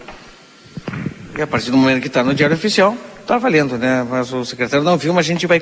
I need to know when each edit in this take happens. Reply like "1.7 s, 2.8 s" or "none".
none